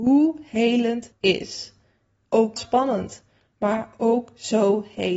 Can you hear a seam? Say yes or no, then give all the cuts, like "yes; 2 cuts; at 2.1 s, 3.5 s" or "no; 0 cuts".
yes; 2 cuts; at 1.1 s, 2.6 s